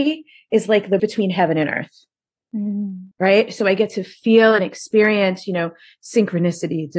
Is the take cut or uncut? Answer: cut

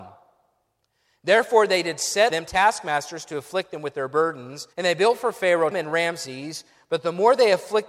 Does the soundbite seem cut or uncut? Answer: cut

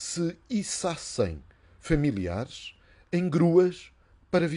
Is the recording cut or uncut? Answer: uncut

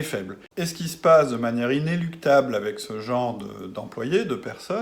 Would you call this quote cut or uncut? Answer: uncut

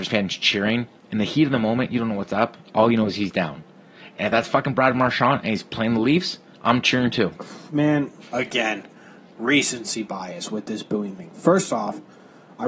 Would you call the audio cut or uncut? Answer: cut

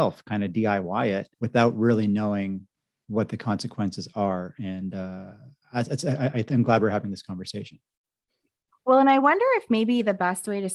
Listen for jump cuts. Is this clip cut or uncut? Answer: cut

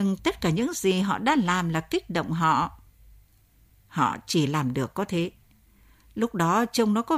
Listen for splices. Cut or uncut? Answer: uncut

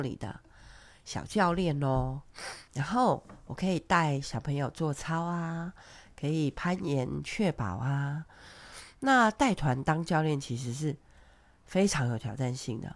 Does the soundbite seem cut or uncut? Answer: cut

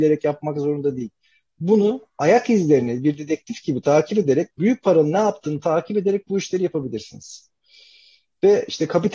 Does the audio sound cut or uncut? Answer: uncut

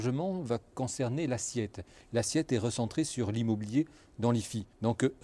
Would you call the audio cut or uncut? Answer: uncut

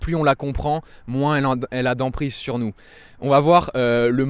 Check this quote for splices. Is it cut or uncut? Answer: uncut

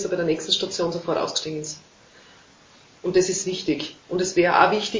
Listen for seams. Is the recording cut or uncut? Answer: uncut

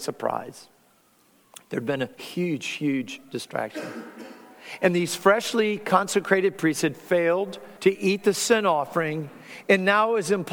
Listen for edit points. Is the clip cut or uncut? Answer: cut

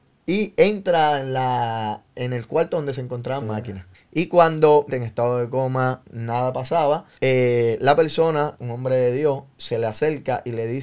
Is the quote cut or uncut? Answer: cut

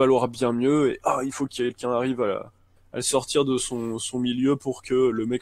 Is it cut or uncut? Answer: uncut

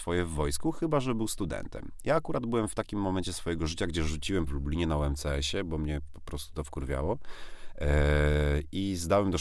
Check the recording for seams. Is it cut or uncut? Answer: cut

